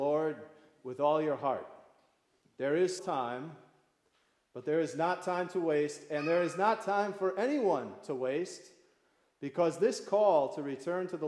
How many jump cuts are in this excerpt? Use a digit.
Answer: 1